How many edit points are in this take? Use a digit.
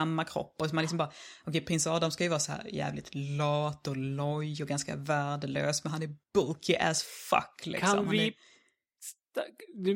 1